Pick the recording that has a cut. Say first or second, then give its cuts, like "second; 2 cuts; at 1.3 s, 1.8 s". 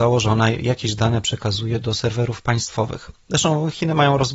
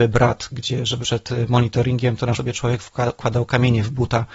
second; 2 cuts; at 1.0 s, 2.3 s